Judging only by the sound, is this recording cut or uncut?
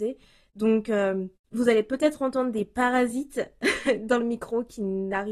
uncut